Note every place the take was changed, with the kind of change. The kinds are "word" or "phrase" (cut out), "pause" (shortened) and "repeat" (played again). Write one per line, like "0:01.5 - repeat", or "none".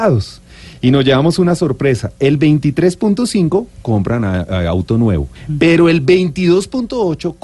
0:05.4 - pause